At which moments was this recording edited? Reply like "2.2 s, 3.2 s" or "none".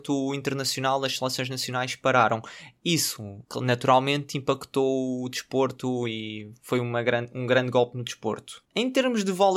3.4 s, 8.6 s